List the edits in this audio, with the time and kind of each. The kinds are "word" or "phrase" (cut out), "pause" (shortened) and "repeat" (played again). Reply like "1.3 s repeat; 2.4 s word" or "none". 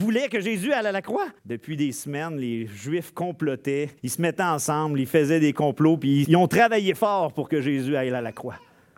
1.4 s pause; 4.0 s pause; 6.2 s word

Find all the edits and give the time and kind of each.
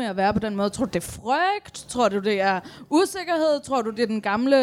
none

